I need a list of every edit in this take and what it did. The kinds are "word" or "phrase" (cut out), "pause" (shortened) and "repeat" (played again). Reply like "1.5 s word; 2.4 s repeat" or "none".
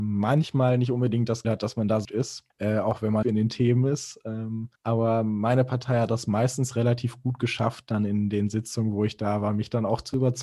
1.4 s word; 2.0 s word; 2.5 s pause; 3.2 s phrase; 4.8 s pause